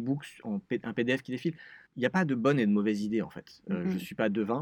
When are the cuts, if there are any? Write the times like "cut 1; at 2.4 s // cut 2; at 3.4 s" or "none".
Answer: cut 1; at 1.9 s